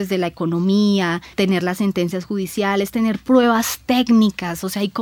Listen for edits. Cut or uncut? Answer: cut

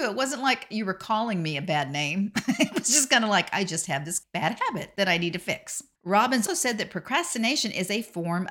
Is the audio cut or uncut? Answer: cut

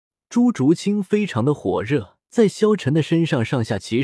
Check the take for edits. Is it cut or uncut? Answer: cut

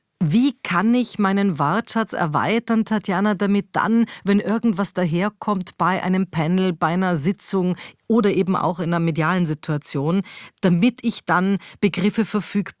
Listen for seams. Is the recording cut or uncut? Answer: uncut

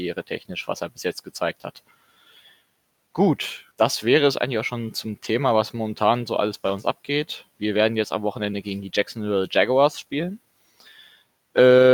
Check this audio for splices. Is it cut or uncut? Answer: cut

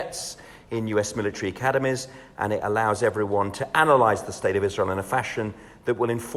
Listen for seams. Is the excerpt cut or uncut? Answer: uncut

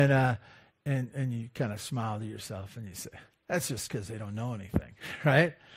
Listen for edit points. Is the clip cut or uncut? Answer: uncut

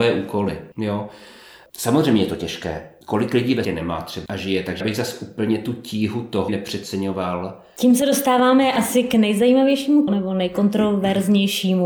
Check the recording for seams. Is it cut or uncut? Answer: cut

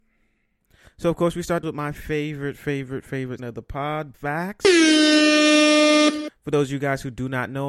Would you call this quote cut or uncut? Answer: cut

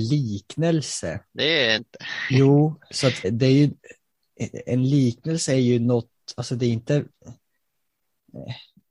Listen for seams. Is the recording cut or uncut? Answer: cut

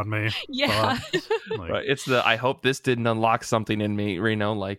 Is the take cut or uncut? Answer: uncut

